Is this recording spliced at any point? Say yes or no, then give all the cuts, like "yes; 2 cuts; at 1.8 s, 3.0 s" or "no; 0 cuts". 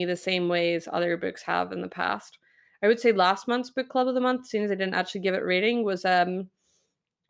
no; 0 cuts